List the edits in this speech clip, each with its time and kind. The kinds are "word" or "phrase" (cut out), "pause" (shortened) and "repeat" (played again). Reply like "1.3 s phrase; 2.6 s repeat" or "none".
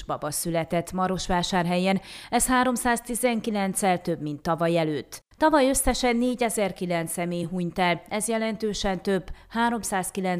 none